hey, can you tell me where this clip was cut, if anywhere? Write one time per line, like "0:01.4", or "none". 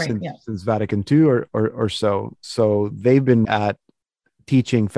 0:03.4